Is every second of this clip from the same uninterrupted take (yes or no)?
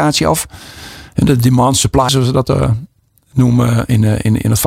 no